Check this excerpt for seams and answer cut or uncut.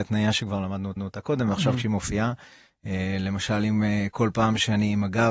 cut